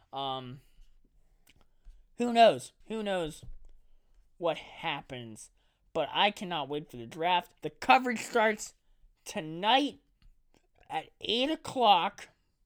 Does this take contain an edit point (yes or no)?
yes